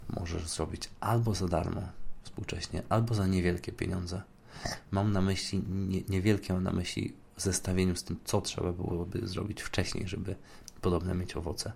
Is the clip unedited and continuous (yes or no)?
yes